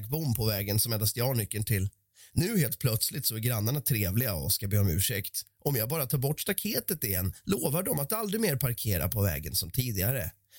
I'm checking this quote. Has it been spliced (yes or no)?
no